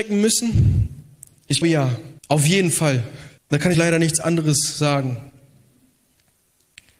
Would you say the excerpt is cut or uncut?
cut